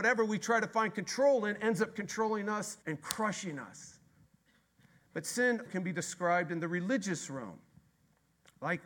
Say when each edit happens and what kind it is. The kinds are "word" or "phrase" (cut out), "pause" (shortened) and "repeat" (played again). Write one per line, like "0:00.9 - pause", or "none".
0:02.8 - pause
0:04.2 - pause
0:05.7 - word